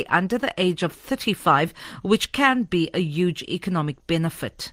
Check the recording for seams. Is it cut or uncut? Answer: uncut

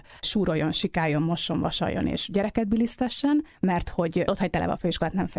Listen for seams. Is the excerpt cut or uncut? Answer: cut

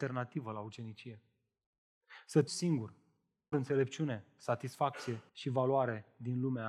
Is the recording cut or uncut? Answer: cut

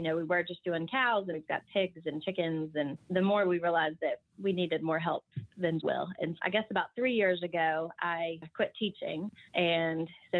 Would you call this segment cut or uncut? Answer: cut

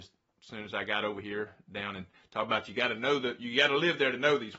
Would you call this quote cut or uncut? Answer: uncut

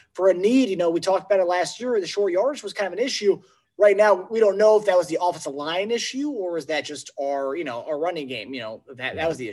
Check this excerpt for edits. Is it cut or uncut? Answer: uncut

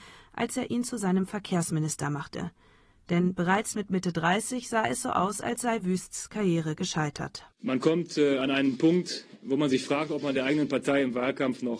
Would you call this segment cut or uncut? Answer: uncut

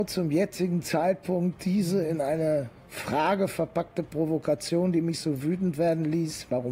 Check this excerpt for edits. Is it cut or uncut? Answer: uncut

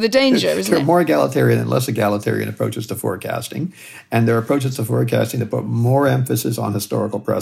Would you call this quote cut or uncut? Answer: uncut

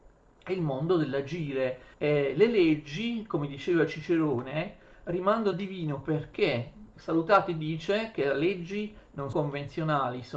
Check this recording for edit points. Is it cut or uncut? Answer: cut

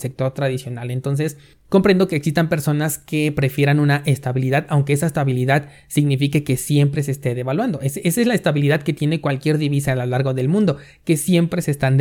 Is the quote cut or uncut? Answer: uncut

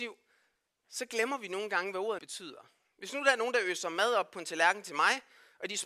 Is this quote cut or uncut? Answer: cut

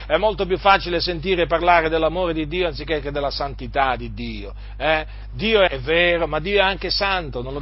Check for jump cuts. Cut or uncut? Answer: cut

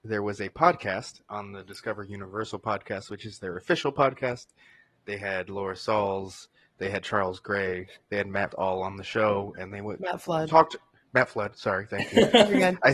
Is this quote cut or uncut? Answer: cut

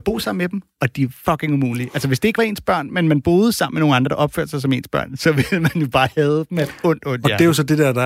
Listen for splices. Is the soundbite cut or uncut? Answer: uncut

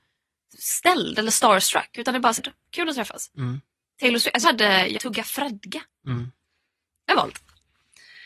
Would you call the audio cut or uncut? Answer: cut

